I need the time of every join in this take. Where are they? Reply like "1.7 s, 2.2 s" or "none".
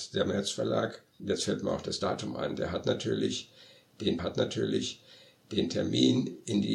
1.2 s, 4.2 s